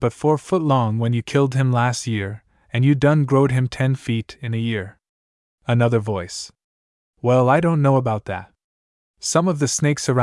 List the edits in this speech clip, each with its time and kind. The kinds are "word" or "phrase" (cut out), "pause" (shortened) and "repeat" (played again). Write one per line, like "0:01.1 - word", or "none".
none